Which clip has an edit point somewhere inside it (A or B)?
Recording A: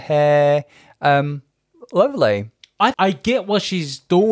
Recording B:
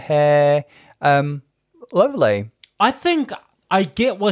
A